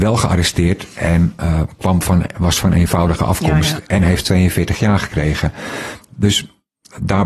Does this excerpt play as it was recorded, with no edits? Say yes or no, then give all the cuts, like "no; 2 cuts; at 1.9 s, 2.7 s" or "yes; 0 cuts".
yes; 0 cuts